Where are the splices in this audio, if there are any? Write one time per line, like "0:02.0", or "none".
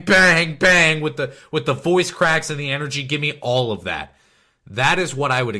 none